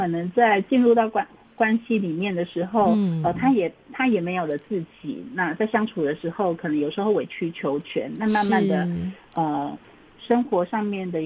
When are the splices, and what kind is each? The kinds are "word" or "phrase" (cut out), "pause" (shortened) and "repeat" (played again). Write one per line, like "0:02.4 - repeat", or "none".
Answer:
none